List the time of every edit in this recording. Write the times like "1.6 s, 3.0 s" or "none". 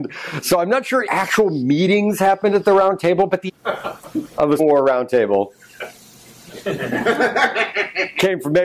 1.1 s, 3.5 s, 4.6 s